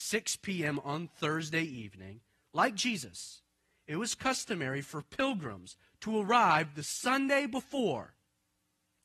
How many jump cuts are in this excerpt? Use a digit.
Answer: 0